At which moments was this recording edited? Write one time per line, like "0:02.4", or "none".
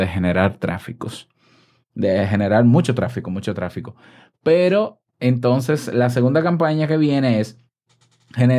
none